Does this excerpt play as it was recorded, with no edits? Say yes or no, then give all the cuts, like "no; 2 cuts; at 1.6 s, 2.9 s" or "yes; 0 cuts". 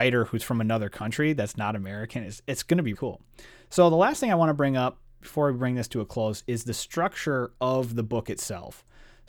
no; 1 cut; at 2.9 s